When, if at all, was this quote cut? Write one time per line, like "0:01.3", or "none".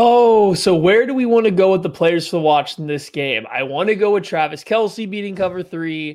none

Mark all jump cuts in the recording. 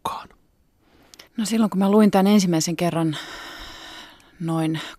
0:01.3

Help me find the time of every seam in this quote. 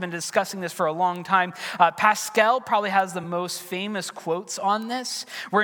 none

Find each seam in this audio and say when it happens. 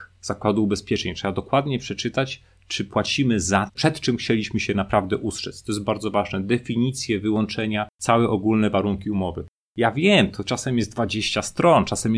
0:03.7
0:05.8
0:07.9

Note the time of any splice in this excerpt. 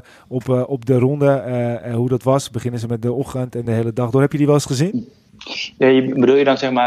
none

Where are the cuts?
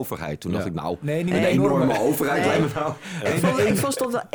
none

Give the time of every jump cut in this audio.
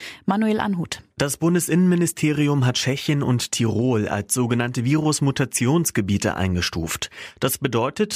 0:01.1

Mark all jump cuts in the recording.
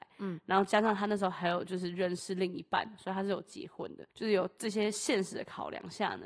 0:04.1

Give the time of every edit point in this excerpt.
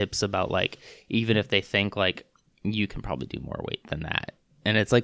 none

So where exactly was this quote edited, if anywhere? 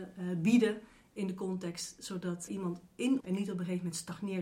0:02.5
0:03.2

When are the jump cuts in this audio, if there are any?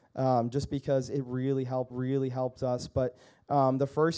0:01.9

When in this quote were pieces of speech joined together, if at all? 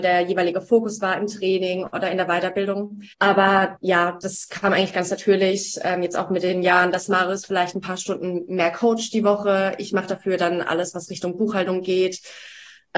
0:03.1

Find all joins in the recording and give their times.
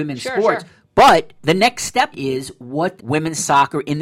0:01.4
0:02.1
0:03.0

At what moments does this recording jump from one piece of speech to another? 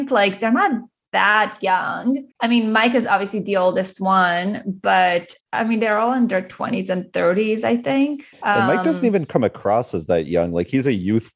0:02.3
0:05.4
0:08.3

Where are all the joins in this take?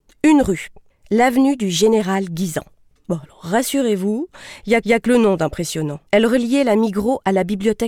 0:00.9
0:04.8
0:06.1

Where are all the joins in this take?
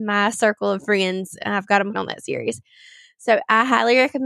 0:01.9

